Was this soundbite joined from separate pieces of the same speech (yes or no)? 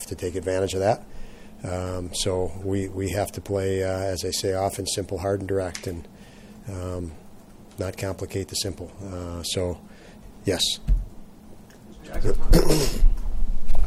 no